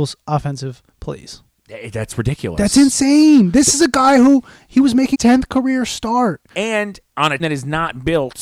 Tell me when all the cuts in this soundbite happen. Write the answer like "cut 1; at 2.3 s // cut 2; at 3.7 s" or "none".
cut 1; at 0.9 s // cut 2; at 5.1 s // cut 3; at 6.5 s // cut 4; at 7.4 s